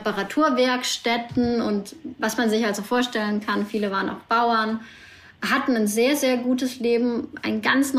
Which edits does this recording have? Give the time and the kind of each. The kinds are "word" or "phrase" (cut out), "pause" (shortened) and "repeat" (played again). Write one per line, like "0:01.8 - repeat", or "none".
none